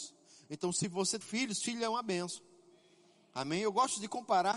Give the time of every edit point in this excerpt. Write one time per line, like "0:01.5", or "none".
0:01.2